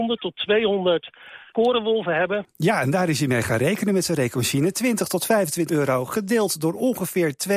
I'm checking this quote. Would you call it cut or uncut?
cut